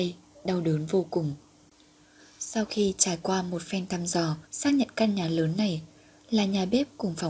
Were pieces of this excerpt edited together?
yes; 1 cut; at 4.5 s

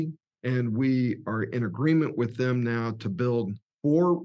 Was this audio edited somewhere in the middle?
no; 0 cuts

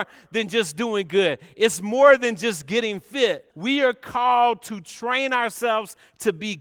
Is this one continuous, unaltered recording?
no; 1 cut; at 3.5 s

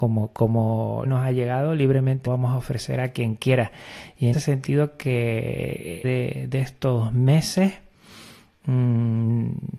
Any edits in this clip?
yes; 4 cuts; at 1.0 s, 2.3 s, 4.3 s, 6.0 s

